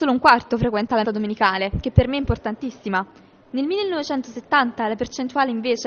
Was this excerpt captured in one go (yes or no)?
no